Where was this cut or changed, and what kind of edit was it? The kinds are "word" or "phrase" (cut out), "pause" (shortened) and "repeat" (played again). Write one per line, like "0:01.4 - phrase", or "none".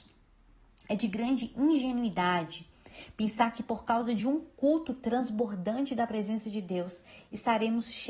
none